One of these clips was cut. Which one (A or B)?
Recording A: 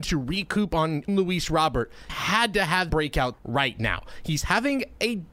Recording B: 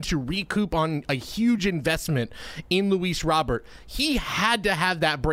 A